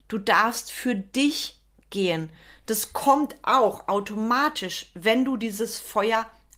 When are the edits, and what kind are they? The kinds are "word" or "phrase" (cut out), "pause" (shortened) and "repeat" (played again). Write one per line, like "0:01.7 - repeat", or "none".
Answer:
none